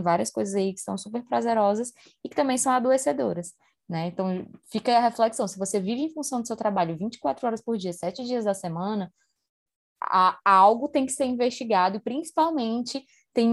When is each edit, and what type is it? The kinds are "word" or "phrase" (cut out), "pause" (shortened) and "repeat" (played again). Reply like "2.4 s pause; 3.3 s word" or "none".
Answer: none

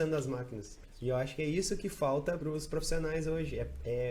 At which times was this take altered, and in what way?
2.4 s word

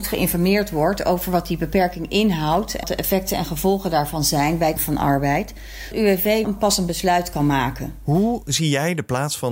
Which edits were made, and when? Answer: 2.8 s word; 4.8 s word; 5.9 s word; 6.4 s word

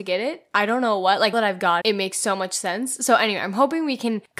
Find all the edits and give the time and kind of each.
1.3 s word; 1.8 s word

